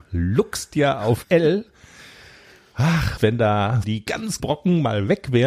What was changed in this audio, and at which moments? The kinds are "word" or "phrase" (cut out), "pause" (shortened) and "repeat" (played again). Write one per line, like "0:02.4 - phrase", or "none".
0:01.2 - word
0:03.2 - word
0:03.8 - word
0:04.4 - word